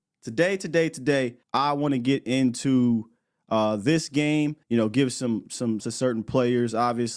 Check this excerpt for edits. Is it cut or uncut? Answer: cut